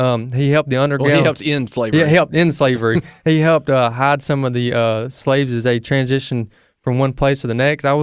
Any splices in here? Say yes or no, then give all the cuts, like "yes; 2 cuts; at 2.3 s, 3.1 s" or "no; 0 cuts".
no; 0 cuts